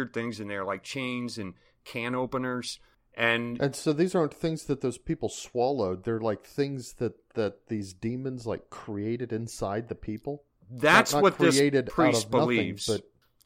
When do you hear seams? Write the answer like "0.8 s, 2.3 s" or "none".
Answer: none